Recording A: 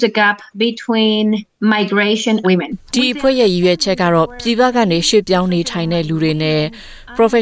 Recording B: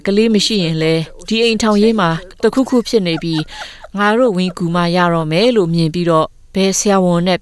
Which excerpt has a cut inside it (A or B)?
A